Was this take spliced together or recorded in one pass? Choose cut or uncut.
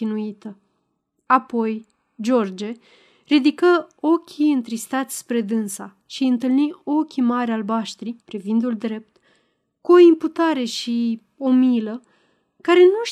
cut